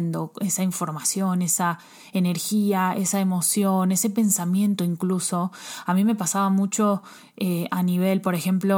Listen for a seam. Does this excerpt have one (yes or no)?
no